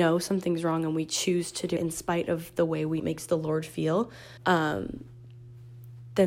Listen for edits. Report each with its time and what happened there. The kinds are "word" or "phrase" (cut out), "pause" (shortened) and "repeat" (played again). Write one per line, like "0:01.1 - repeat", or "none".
0:01.8 - word
0:03.0 - word
0:04.4 - pause